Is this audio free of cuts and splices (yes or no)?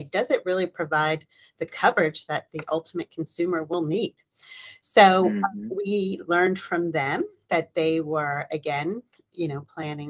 yes